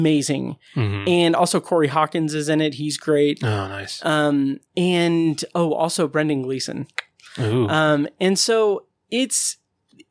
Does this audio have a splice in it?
yes; 1 cut; at 4.7 s

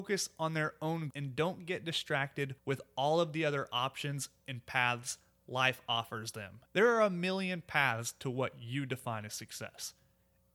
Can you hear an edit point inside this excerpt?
yes; 3 cuts; at 1.1 s, 2.6 s, 6.7 s

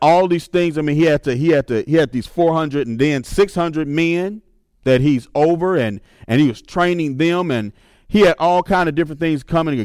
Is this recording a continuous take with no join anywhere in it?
yes; 0 cuts

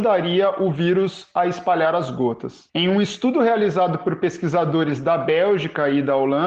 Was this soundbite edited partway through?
yes; 1 cut; at 2.7 s

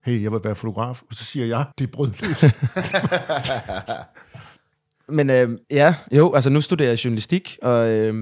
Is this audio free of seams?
no; 2 cuts; at 1.7 s, 5.6 s

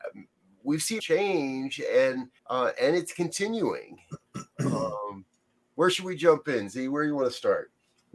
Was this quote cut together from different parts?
yes; 2 cuts; at 1.0 s, 2.4 s

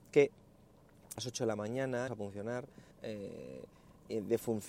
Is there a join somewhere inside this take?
yes; 3 cuts; at 1.2 s, 2.1 s, 2.9 s

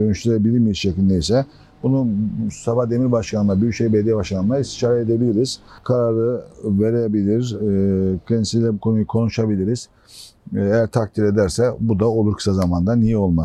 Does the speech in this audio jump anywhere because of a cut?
no; 0 cuts

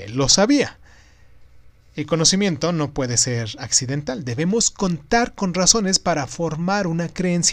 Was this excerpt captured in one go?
yes; 0 cuts

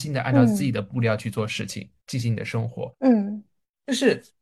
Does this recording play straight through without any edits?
yes; 0 cuts

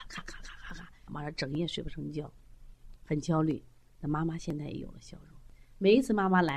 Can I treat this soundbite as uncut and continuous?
no; 1 cut; at 1.1 s

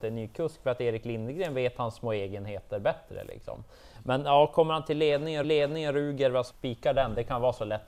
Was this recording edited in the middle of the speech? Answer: yes; 2 cuts; at 5.4 s, 6.5 s

